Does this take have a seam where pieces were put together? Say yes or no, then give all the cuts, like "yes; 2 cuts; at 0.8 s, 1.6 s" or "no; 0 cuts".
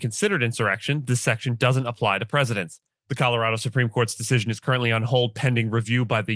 no; 0 cuts